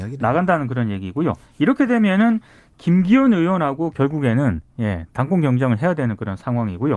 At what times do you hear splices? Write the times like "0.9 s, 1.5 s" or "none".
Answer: none